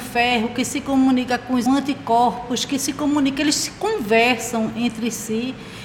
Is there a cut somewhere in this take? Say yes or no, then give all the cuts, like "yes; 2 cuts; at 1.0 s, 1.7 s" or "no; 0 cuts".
yes; 1 cut; at 1.7 s